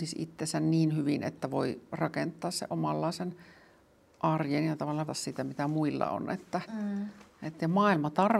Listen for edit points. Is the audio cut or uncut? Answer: cut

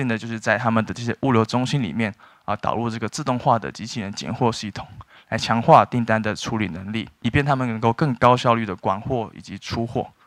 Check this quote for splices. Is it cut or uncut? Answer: uncut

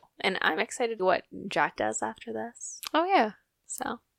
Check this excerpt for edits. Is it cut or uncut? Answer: cut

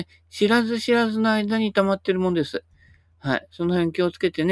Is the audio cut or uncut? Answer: uncut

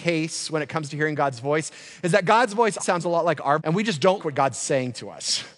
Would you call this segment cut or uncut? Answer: cut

